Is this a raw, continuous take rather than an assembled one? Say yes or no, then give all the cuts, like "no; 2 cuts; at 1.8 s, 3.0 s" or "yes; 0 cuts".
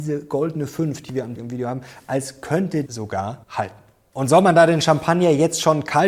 no; 3 cuts; at 1.4 s, 2.9 s, 3.4 s